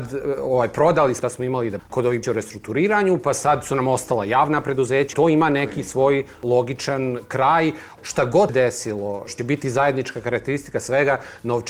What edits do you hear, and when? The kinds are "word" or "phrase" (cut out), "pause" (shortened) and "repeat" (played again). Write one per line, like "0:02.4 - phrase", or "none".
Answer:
0:01.2 - word
0:01.8 - word
0:02.2 - word
0:05.1 - word
0:08.5 - word
0:09.4 - word